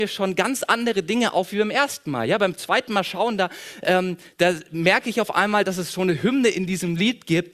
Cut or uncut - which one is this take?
uncut